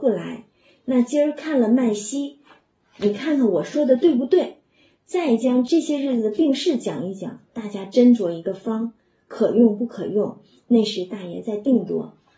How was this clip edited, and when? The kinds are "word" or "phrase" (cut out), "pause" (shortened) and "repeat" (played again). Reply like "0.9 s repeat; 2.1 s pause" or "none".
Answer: none